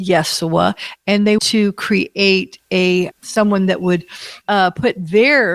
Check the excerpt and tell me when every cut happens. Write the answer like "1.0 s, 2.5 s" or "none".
1.4 s, 3.1 s, 4.4 s